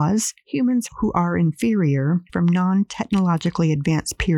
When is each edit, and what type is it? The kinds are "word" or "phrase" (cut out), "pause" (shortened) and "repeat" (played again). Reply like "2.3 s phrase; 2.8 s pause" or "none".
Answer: 2.3 s phrase